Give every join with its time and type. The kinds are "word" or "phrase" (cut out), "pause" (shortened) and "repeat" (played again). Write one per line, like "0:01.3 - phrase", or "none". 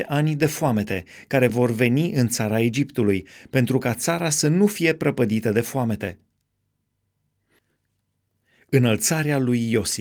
none